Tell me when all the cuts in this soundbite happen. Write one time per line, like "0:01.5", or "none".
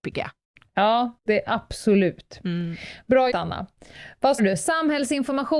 0:01.2
0:03.3
0:04.4